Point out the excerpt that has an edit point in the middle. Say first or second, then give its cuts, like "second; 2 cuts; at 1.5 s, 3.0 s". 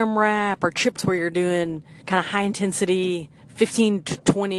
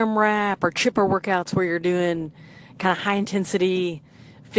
first; 3 cuts; at 1.0 s, 2.0 s, 3.4 s